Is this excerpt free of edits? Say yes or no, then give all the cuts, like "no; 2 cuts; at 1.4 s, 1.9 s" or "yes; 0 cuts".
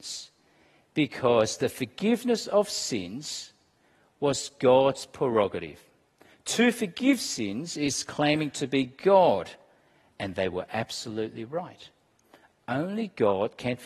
yes; 0 cuts